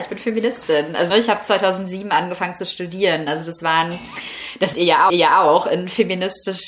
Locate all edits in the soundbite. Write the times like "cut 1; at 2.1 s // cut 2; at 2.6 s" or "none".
cut 1; at 1.1 s // cut 2; at 4.7 s // cut 3; at 5.1 s